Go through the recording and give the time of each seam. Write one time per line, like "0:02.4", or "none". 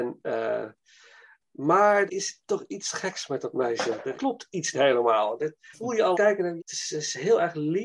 0:02.1
0:04.2
0:04.7
0:05.7
0:06.1
0:06.6